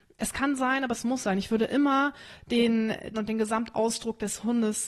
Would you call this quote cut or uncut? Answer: cut